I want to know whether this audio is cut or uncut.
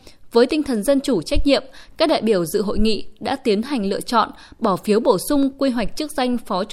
uncut